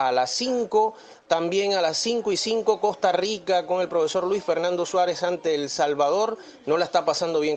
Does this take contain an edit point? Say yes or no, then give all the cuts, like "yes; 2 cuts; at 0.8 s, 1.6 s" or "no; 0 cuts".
no; 0 cuts